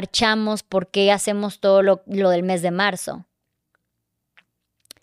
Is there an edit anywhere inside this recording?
no; 0 cuts

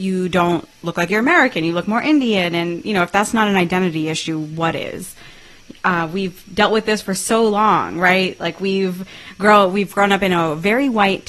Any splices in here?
no; 0 cuts

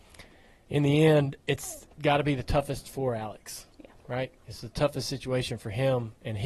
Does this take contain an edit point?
yes; 1 cut; at 1.9 s

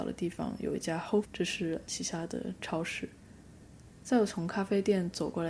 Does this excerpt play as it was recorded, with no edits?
no; 2 cuts; at 1.2 s, 1.9 s

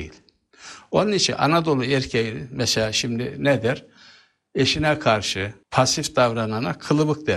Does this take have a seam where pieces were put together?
yes; 1 cut; at 5.6 s

